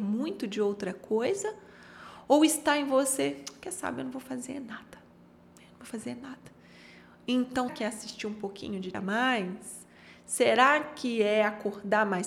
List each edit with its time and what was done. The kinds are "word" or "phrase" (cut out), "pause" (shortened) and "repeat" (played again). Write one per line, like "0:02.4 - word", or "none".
0:07.7 - word
0:08.9 - word